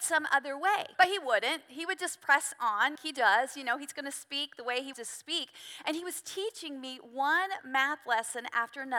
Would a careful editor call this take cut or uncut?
cut